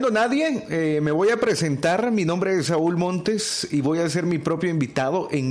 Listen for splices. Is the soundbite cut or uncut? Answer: uncut